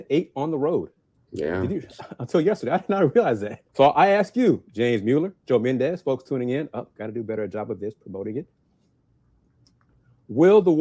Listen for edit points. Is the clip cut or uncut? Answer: cut